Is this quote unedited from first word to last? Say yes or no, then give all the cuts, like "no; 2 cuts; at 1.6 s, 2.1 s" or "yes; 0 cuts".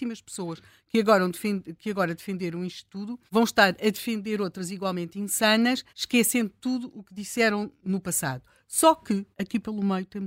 no; 3 cuts; at 3.3 s, 5.9 s, 9.3 s